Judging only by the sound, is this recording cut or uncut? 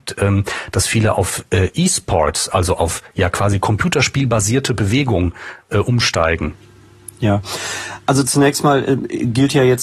uncut